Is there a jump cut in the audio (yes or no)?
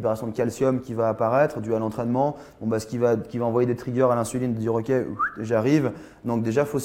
no